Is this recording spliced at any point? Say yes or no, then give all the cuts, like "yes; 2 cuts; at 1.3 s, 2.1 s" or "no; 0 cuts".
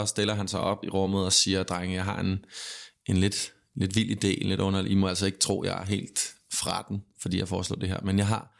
no; 0 cuts